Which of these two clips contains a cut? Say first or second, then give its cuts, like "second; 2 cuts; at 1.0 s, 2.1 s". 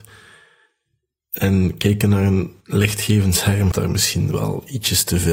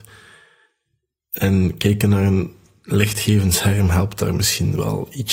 first; 2 cuts; at 2.6 s, 3.7 s